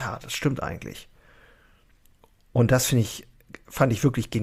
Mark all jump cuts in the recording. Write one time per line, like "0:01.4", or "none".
none